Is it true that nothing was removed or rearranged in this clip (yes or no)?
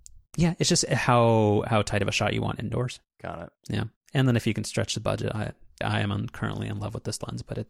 no